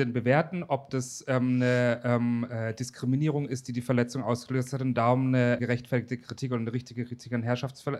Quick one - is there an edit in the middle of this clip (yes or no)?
yes